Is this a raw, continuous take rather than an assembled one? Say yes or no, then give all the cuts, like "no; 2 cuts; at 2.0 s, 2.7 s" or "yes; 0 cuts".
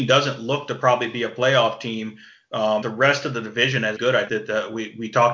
no; 3 cuts; at 2.8 s, 4.0 s, 4.3 s